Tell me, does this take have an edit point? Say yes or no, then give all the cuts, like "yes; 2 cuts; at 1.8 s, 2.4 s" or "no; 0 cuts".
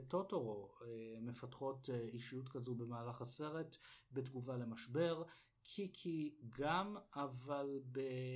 no; 0 cuts